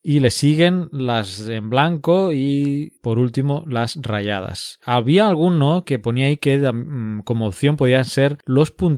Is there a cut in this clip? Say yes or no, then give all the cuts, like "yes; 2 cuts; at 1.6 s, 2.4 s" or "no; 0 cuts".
yes; 1 cut; at 3.0 s